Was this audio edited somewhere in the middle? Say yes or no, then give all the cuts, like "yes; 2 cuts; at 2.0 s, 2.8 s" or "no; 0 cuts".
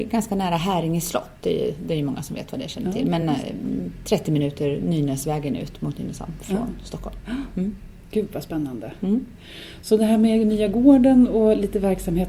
no; 0 cuts